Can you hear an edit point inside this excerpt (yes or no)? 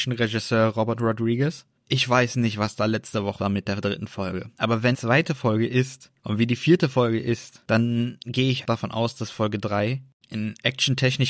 yes